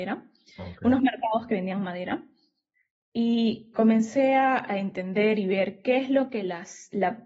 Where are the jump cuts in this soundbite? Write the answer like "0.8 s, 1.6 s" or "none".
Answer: 3.7 s